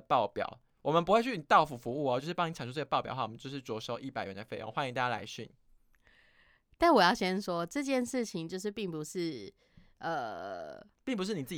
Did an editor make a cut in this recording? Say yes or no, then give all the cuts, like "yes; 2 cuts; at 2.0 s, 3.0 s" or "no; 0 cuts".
no; 0 cuts